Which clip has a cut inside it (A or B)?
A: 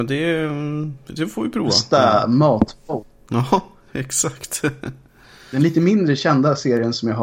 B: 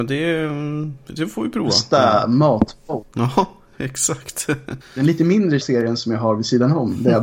B